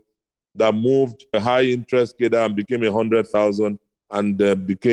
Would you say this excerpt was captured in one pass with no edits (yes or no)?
no